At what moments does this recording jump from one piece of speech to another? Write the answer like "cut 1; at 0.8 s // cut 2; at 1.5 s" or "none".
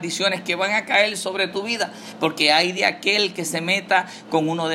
none